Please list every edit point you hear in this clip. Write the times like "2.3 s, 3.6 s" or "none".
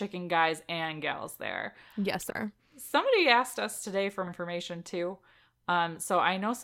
2.3 s, 4.3 s